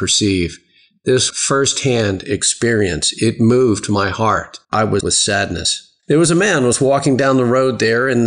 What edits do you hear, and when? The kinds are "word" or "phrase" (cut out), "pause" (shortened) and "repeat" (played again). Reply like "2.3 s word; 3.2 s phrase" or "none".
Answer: 1.3 s word; 4.6 s pause; 5.0 s word; 6.0 s pause